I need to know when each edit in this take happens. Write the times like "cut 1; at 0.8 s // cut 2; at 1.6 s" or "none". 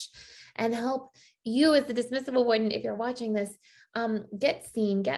none